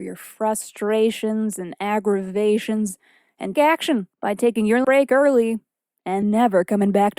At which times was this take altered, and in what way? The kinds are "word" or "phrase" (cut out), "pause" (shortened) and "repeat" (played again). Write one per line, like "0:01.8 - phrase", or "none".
0:03.5 - word
0:04.1 - pause
0:04.8 - word
0:06.2 - word